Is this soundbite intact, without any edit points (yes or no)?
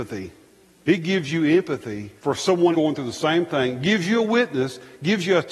no